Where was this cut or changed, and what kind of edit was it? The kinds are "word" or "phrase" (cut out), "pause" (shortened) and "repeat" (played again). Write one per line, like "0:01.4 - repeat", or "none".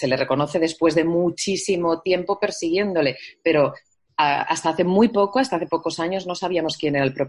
none